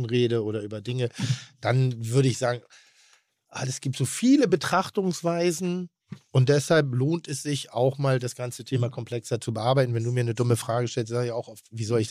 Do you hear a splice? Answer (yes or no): no